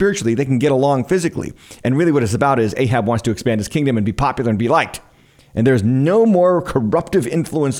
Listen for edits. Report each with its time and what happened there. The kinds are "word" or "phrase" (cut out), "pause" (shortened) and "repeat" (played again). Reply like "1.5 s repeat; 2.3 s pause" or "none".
none